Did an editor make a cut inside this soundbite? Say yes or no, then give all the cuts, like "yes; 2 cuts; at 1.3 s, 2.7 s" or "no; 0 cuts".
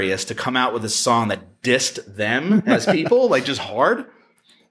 no; 0 cuts